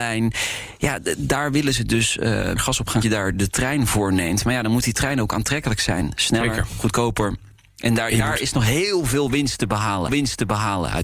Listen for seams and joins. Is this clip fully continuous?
no; 3 cuts; at 2.6 s, 3.0 s, 10.1 s

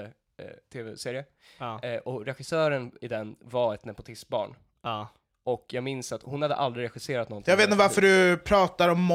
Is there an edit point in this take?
no; 0 cuts

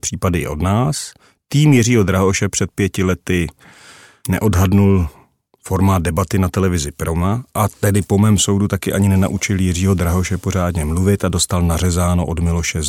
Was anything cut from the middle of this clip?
no; 0 cuts

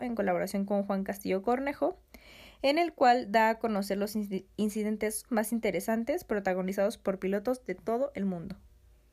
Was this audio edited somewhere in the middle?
yes; 1 cut; at 5.3 s

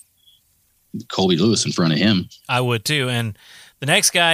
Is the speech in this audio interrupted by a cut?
no; 0 cuts

